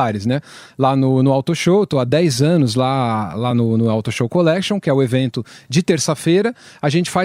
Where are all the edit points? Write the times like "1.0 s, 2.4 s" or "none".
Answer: none